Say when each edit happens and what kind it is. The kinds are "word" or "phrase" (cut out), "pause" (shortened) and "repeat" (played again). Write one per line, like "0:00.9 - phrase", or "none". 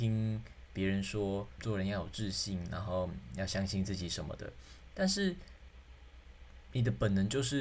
0:01.6 - word